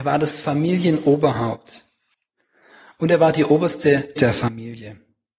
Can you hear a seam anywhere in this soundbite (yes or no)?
yes